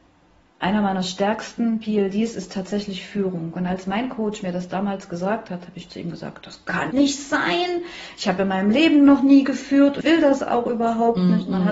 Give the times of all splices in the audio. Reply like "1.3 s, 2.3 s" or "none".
6.9 s, 10.0 s